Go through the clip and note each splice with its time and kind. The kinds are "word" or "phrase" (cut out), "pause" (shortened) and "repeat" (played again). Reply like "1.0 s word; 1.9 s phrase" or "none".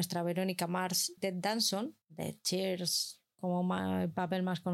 1.2 s word; 2.0 s pause; 3.3 s pause